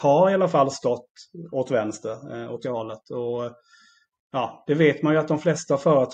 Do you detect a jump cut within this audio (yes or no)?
yes